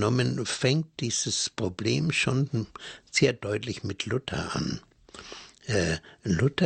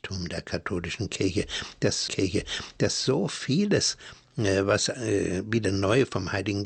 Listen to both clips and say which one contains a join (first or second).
second